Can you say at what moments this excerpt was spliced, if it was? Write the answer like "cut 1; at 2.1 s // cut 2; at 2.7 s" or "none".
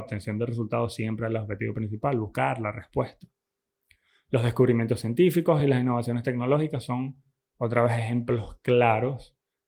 none